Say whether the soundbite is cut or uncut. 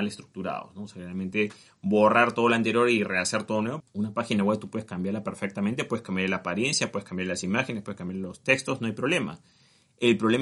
uncut